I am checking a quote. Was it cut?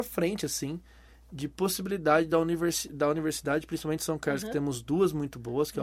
no; 0 cuts

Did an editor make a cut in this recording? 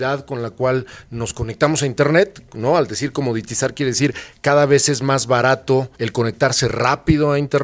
yes; 1 cut; at 5.9 s

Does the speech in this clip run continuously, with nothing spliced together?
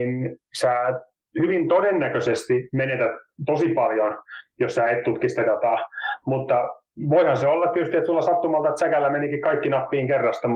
yes; 0 cuts

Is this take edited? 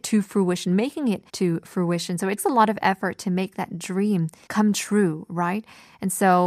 yes; 3 cuts; at 1.3 s, 2.4 s, 4.5 s

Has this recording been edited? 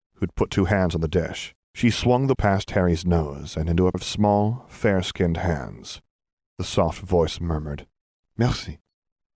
yes; 4 cuts; at 1.6 s, 2.3 s, 3.9 s, 6.6 s

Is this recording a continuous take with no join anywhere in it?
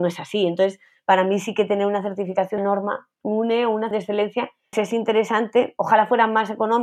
no; 3 cuts; at 2.6 s, 3.9 s, 4.7 s

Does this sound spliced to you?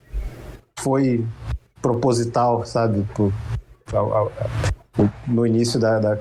no; 0 cuts

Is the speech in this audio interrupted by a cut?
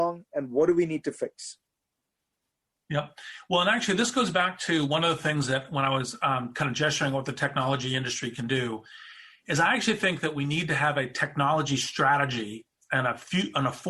no; 0 cuts

